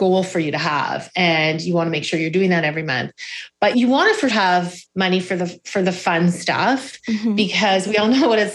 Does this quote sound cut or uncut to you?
cut